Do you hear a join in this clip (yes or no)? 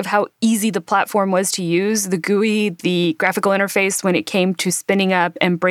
no